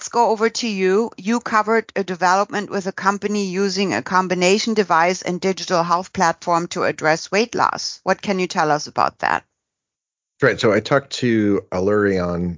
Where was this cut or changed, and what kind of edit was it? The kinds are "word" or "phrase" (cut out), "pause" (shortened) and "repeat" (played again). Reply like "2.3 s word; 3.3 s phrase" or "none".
none